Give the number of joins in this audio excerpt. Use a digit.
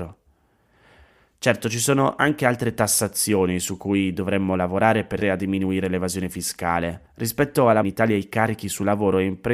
3